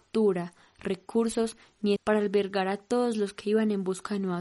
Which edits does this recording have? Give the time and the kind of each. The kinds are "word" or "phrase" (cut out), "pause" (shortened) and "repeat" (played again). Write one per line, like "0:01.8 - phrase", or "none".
0:02.0 - word